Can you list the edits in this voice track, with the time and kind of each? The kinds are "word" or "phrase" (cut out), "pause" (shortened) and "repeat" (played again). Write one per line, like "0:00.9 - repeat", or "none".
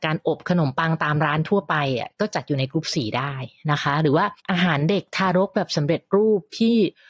0:04.4 - pause